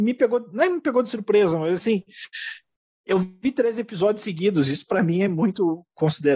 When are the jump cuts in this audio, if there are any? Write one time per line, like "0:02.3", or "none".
none